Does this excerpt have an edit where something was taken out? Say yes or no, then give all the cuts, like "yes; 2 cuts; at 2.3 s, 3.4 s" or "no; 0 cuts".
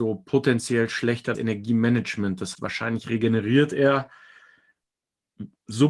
yes; 2 cuts; at 1.3 s, 2.5 s